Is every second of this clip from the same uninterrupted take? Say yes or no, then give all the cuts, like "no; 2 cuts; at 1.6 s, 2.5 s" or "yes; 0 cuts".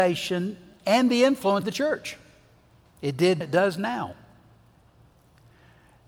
no; 2 cuts; at 1.6 s, 3.4 s